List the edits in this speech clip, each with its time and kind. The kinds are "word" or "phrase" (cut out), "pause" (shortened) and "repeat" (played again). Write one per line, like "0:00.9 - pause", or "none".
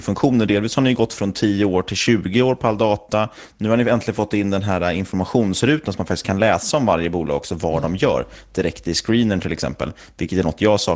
none